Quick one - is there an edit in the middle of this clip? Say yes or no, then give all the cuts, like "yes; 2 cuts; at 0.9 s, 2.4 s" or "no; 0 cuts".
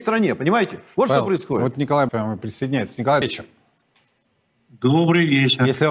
yes; 2 cuts; at 2.1 s, 3.2 s